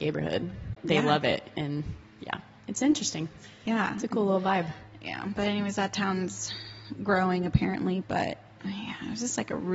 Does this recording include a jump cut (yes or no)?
no